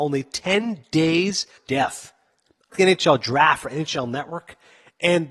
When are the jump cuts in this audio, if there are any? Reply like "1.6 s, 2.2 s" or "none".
1.6 s, 2.7 s